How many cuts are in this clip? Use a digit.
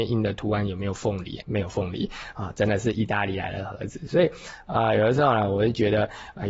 1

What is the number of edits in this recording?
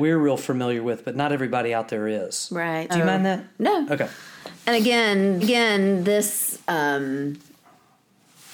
2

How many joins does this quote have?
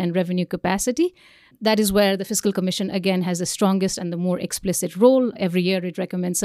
0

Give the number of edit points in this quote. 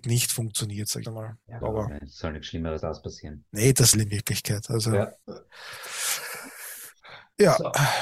4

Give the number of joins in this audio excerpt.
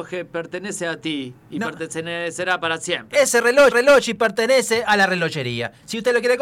1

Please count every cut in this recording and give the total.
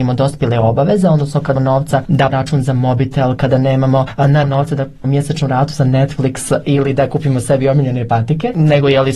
4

